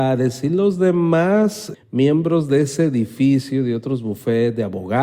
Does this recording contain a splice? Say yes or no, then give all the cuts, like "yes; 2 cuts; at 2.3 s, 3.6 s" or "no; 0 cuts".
yes; 1 cut; at 1.7 s